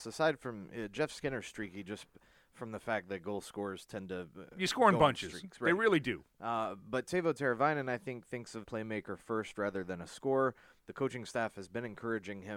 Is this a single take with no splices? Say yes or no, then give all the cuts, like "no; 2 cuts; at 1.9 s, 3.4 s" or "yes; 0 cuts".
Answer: no; 1 cut; at 8.6 s